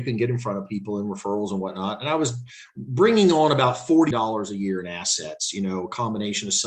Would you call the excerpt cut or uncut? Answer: cut